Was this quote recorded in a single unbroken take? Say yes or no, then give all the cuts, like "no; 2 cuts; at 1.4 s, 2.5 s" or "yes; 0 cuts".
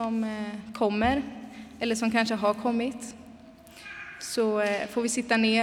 yes; 0 cuts